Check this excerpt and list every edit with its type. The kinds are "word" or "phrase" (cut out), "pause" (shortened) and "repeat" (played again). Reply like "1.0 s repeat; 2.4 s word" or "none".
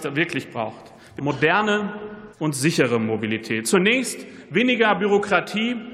1.2 s word; 2.3 s pause